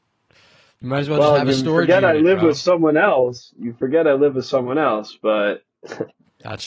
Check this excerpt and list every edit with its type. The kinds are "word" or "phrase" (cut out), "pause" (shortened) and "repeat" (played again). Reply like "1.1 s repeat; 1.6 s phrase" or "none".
none

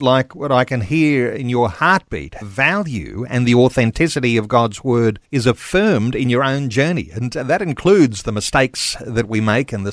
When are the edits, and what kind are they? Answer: 2.4 s word; 5.2 s pause

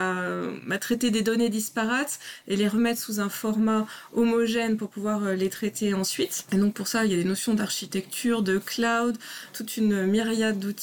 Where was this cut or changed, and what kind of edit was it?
none

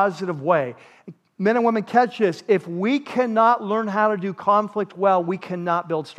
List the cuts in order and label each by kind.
none

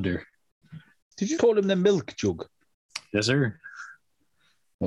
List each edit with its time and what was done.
1.0 s pause; 1.4 s word

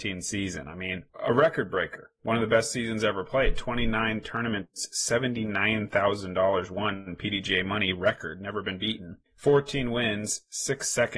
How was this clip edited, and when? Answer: 1.1 s pause; 9.3 s pause

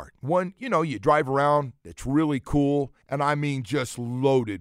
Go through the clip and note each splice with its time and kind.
3.0 s pause

